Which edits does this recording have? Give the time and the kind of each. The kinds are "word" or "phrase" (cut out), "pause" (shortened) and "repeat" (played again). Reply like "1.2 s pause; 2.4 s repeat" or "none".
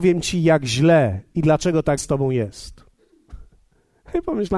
2.0 s word